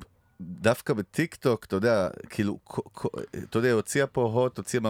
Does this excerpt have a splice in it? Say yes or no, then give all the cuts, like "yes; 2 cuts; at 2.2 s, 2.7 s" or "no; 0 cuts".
no; 0 cuts